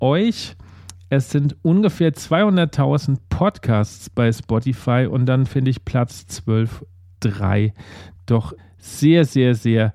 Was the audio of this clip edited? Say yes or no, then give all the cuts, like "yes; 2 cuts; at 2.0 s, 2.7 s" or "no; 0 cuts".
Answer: yes; 2 cuts; at 7.1 s, 8.6 s